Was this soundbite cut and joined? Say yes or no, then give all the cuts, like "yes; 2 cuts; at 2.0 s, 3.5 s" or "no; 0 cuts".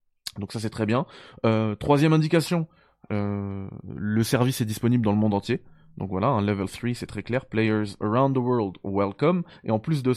no; 0 cuts